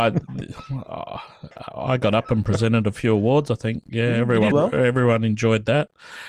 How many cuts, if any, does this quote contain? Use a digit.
1